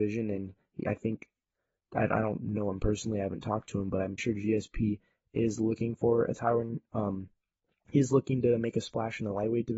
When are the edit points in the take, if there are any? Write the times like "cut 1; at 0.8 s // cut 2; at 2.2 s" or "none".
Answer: cut 1; at 4.2 s